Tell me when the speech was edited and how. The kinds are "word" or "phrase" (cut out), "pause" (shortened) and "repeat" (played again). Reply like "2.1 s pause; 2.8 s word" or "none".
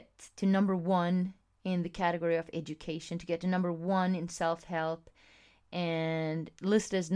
none